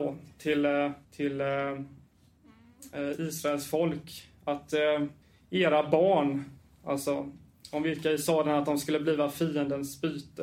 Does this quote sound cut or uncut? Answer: cut